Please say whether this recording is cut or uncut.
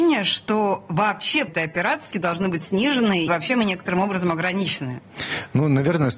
cut